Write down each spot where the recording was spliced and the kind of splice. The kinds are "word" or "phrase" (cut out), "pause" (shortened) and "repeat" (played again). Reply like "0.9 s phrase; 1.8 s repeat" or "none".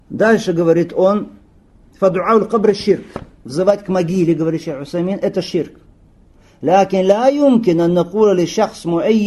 none